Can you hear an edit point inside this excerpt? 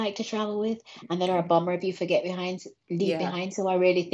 no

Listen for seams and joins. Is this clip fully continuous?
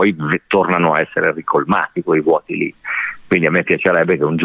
yes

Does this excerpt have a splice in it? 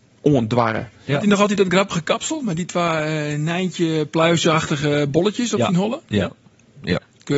no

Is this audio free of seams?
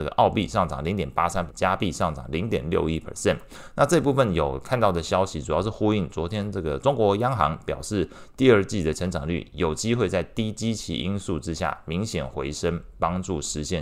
no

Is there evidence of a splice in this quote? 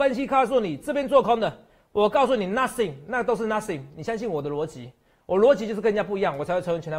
no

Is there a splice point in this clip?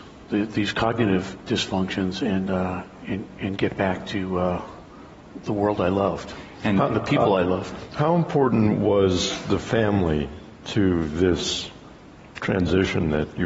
no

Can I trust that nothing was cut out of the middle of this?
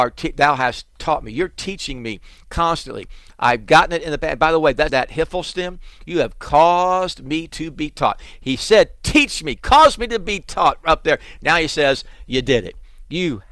no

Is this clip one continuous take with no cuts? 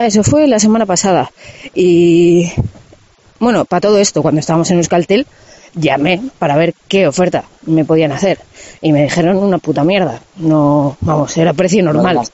yes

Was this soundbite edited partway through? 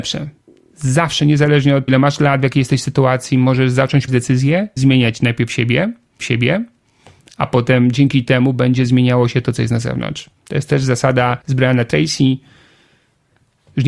yes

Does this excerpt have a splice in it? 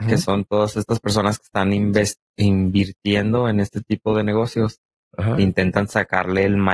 no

